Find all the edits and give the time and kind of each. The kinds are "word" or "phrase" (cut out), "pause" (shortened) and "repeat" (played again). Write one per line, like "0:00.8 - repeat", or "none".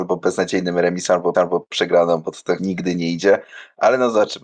0:01.3 - repeat
0:02.6 - phrase